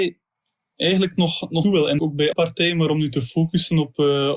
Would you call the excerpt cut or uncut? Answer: cut